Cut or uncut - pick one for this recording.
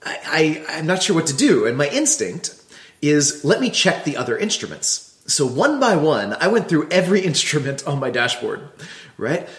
uncut